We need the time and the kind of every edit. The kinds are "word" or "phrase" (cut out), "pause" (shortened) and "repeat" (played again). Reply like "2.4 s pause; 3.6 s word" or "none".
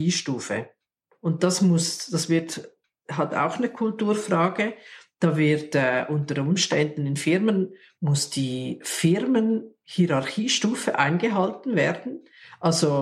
none